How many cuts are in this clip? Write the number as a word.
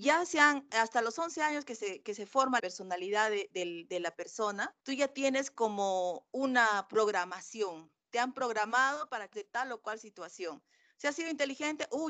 three